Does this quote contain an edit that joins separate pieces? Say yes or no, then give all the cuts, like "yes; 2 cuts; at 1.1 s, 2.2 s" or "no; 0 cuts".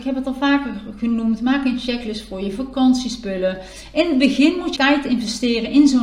yes; 1 cut; at 4.8 s